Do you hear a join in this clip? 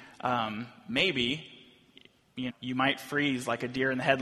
yes; 1 cut; at 2.5 s

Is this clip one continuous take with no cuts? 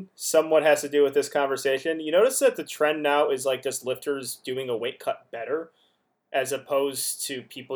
yes; 0 cuts

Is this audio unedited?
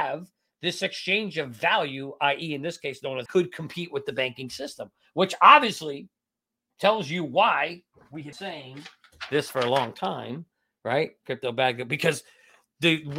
no; 2 cuts; at 3.3 s, 8.3 s

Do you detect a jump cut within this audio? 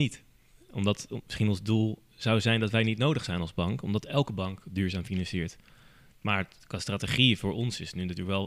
no; 0 cuts

